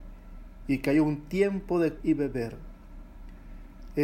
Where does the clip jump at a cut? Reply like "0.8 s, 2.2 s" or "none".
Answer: 2.0 s